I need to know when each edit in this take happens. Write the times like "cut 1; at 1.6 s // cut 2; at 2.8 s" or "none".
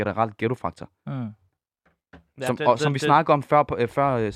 none